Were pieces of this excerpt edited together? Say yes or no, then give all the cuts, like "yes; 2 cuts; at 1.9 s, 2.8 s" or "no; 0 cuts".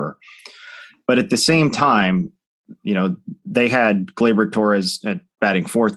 no; 0 cuts